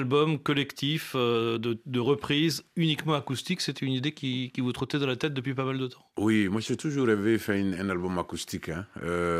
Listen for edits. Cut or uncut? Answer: uncut